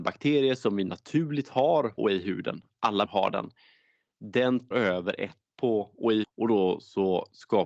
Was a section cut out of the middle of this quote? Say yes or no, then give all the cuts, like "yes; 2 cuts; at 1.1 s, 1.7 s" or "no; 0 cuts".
yes; 5 cuts; at 2.0 s, 3.0 s, 4.7 s, 5.4 s, 6.2 s